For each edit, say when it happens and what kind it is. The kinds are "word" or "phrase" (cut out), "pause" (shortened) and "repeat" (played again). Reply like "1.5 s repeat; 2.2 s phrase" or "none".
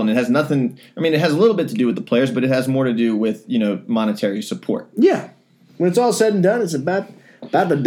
none